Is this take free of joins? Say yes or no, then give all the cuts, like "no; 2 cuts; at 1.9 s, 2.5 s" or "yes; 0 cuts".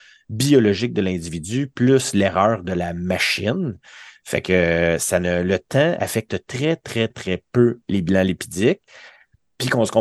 no; 1 cut; at 7.1 s